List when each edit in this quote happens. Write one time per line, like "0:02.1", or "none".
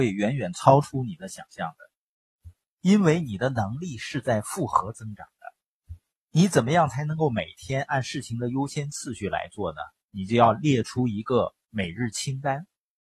none